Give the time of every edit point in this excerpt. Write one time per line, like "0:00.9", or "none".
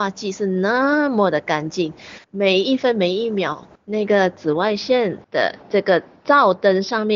0:02.2
0:03.8
0:05.2